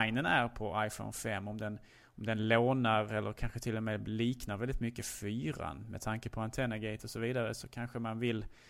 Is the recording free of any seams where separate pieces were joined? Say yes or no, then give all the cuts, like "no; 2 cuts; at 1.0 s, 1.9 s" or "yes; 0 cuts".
yes; 0 cuts